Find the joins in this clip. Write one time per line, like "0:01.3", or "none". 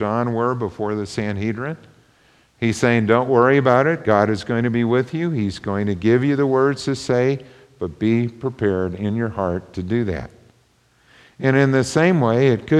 none